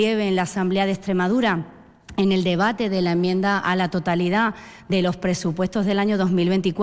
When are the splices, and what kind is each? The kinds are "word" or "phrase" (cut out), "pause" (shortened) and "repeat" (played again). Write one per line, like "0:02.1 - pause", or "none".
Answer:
none